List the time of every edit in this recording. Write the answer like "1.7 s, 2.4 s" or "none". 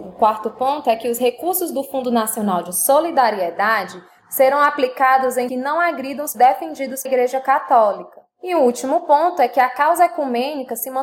5.5 s, 6.3 s, 7.1 s, 8.3 s